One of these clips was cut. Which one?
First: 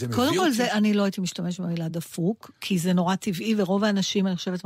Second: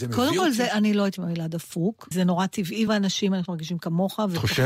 second; 4 cuts; at 1.2 s, 2.1 s, 2.9 s, 3.5 s

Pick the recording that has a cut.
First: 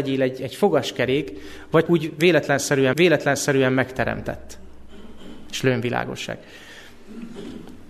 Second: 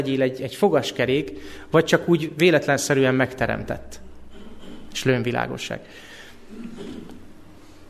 first; 2 cuts; at 1.9 s, 2.9 s

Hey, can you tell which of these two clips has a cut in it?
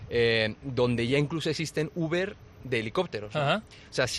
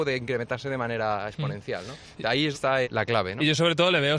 second; 2 cuts; at 2.5 s, 2.8 s

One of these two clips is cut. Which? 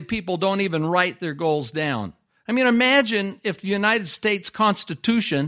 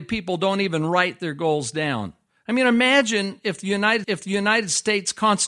second; 1 cut; at 4.0 s

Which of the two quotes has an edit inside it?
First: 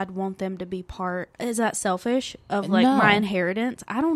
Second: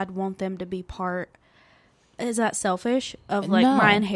first; 1 cut; at 1.3 s

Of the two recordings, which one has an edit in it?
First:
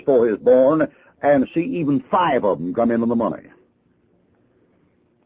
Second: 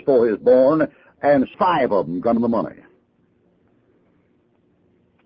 second; 2 cuts; at 1.5 s, 2.4 s

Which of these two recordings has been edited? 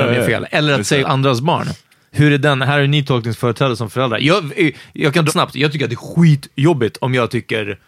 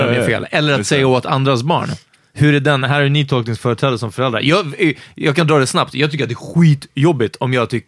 first; 2 cuts; at 1.0 s, 5.3 s

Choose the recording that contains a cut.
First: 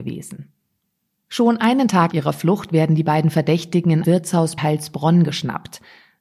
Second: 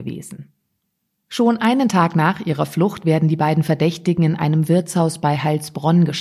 first; 3 cuts; at 2.1 s, 4.0 s, 4.6 s

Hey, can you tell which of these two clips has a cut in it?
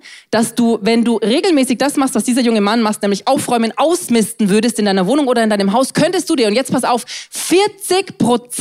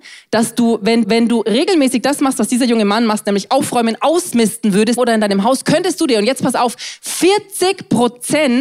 second; 2 cuts; at 1.0 s, 5.0 s

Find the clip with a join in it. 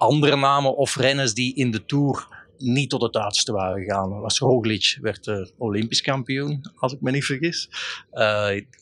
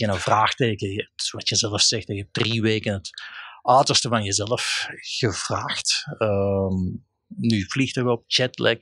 first; 1 cut; at 2.5 s

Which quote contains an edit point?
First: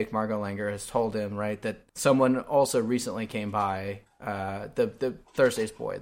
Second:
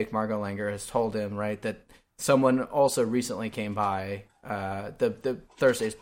first; 1 cut; at 1.9 s

